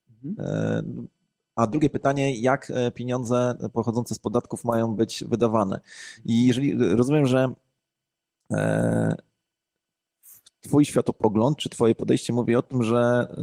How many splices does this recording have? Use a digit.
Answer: 0